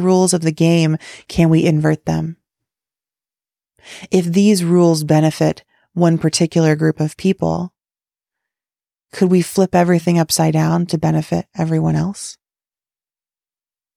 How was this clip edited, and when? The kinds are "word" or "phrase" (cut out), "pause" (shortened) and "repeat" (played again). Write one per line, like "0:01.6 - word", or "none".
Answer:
none

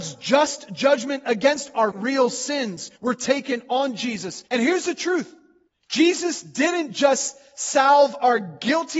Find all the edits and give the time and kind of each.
0:01.9 - word
0:03.0 - pause
0:04.5 - pause
0:05.7 - pause

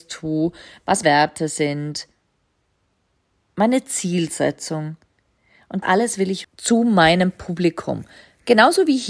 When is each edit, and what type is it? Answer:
0:01.0 - word
0:05.8 - word
0:06.4 - word

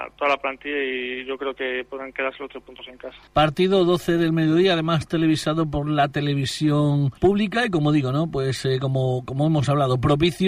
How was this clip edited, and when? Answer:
0:03.3 - pause
0:07.2 - pause

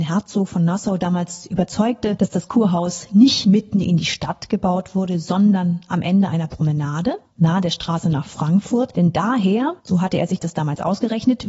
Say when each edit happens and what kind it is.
0:09.8 - pause

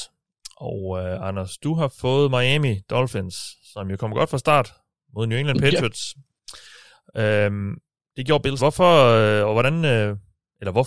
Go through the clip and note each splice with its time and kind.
0:08.6 - phrase

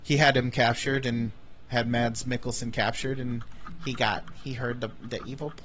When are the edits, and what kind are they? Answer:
none

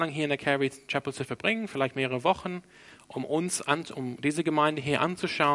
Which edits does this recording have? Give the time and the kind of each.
none

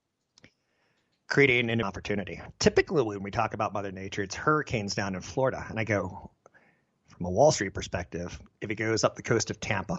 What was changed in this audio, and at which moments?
0:01.8 - word

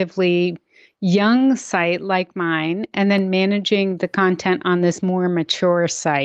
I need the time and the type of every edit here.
none

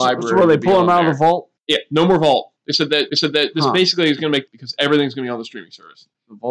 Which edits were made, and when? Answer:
0:01.6 - pause
0:02.6 - pause
0:03.1 - repeat
0:04.5 - phrase

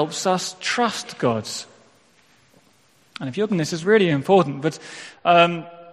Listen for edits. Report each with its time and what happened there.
0:03.5 - word
0:03.8 - word

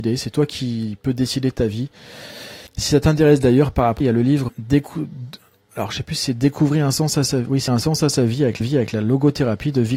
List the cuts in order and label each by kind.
0:02.7 - pause
0:04.0 - phrase
0:04.5 - word
0:07.7 - phrase
0:08.6 - repeat

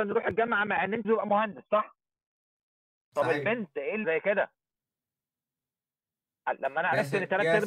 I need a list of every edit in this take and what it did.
0:01.0 - word
0:04.0 - phrase

